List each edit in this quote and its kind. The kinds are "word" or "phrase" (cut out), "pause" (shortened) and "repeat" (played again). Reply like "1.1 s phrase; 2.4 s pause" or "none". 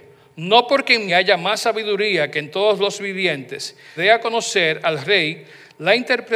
1.1 s word; 4.0 s phrase